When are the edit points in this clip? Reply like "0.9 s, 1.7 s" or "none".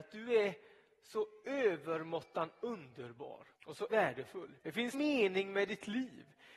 3.5 s, 3.9 s, 4.6 s, 4.9 s